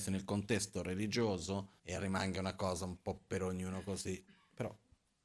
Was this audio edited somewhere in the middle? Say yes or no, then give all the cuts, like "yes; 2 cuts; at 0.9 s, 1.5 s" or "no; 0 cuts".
yes; 1 cut; at 1.8 s